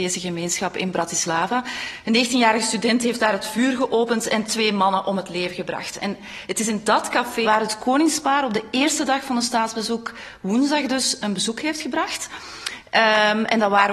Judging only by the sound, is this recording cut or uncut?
cut